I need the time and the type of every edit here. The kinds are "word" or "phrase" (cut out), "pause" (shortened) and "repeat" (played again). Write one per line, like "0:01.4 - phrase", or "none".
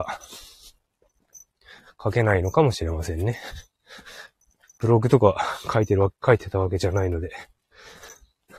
none